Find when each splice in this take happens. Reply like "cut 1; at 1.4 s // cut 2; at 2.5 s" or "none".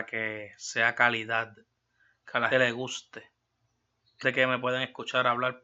cut 1; at 2.5 s // cut 2; at 4.2 s